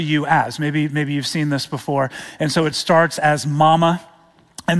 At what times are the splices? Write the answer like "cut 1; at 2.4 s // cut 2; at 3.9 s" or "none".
none